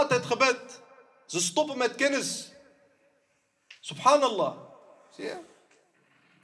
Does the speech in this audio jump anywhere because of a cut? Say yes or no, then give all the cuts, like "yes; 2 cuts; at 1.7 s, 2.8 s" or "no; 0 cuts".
no; 0 cuts